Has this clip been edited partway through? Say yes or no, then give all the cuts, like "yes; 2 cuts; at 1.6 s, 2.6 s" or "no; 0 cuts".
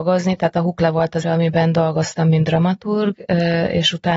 yes; 1 cut; at 1.2 s